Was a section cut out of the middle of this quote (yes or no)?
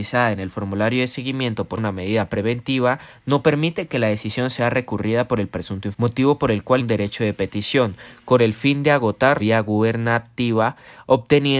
yes